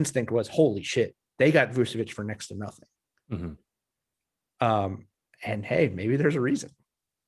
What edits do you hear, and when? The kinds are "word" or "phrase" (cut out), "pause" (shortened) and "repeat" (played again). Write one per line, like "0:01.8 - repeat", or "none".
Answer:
none